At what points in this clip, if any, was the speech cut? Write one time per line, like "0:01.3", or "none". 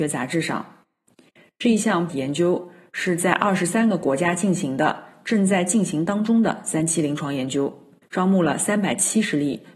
0:02.1
0:08.0